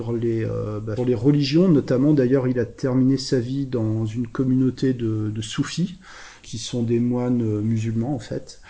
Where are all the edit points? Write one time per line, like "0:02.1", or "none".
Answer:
0:01.0
0:06.4